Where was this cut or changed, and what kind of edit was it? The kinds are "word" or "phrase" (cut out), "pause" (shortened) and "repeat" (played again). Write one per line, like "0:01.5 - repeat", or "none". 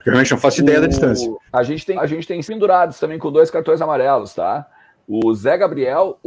0:01.5 - pause
0:01.9 - word
0:02.4 - word

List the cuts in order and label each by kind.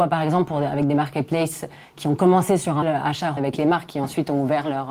0:02.8 - word
0:03.4 - word

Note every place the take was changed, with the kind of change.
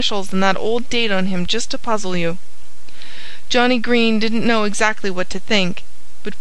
none

